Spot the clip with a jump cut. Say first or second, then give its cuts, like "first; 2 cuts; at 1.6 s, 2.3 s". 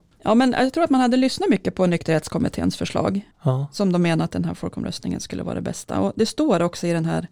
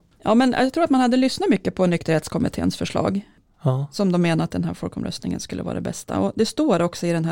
first; 1 cut; at 3.3 s